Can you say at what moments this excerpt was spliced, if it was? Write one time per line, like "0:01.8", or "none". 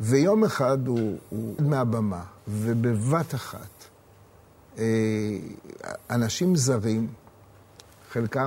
0:01.6
0:02.4